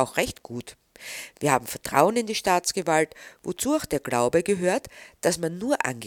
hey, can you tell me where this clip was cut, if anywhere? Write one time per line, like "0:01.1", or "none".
none

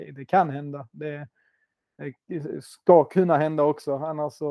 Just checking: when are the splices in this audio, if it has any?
none

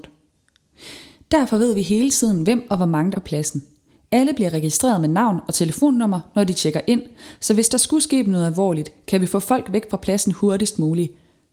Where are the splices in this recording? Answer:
0:03.1

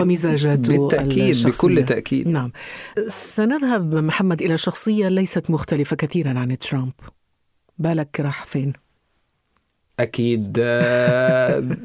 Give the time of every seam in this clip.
none

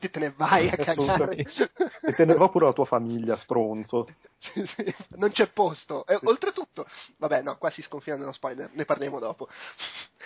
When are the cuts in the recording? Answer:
0:02.4

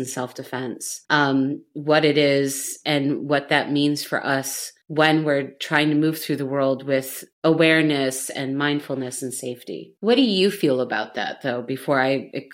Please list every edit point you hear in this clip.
0:01.0
0:04.8
0:07.3
0:10.0

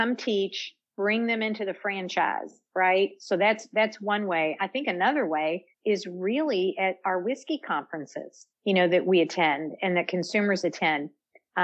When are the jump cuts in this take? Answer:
0:05.7
0:08.5

